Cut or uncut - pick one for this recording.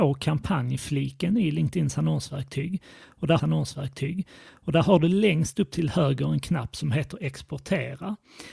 cut